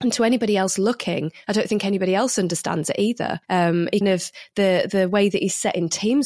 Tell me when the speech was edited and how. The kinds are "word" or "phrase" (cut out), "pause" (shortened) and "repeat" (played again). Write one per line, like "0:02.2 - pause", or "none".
0:03.4 - pause
0:04.0 - word